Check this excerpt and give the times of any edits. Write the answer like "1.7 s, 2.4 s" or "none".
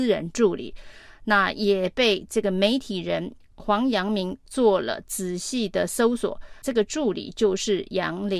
6.6 s